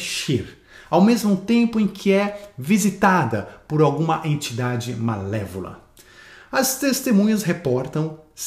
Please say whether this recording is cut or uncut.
uncut